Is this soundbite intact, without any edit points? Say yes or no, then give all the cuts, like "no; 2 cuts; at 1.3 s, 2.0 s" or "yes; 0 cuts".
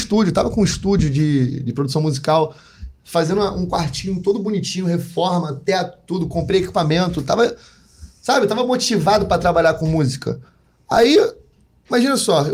yes; 0 cuts